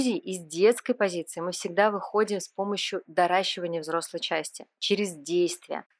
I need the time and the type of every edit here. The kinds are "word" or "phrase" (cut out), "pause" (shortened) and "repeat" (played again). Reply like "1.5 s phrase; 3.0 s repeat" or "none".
none